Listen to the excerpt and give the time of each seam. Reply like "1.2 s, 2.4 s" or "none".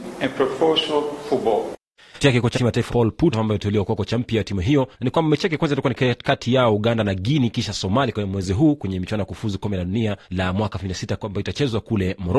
2.2 s, 2.5 s, 2.9 s, 3.3 s, 4.9 s, 10.2 s

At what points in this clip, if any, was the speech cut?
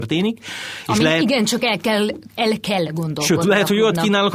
none

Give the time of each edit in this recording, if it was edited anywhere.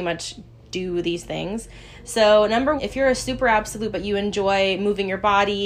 2.8 s, 3.9 s

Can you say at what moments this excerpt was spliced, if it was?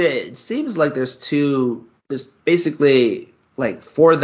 2.0 s

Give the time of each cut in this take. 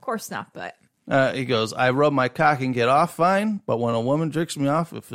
none

